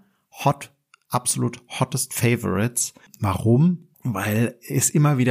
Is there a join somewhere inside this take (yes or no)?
yes